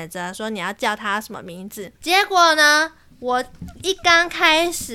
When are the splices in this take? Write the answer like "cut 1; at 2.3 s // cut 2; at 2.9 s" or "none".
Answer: cut 1; at 2.0 s